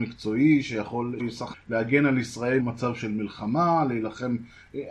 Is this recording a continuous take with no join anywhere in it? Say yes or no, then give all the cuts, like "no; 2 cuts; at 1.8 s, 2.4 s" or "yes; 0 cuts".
no; 3 cuts; at 1.2 s, 1.5 s, 2.6 s